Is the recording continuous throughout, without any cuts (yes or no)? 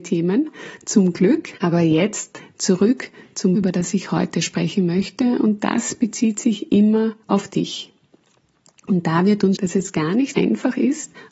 no